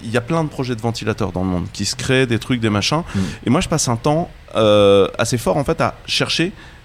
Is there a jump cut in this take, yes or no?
yes